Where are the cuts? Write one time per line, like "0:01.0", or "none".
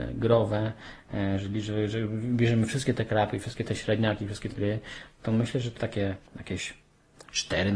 0:04.5
0:05.8
0:06.3